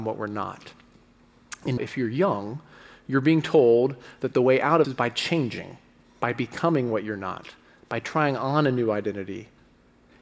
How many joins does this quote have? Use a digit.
2